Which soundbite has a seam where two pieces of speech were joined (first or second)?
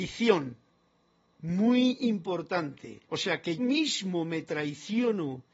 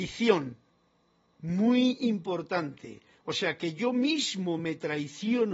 first